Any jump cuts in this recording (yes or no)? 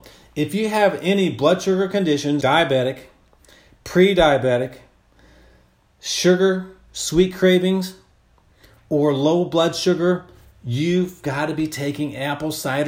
yes